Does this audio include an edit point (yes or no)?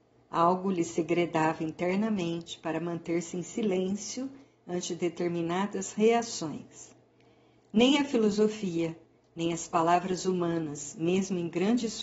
no